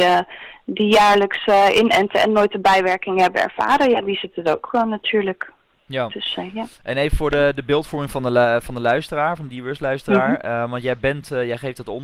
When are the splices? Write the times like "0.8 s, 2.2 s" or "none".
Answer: none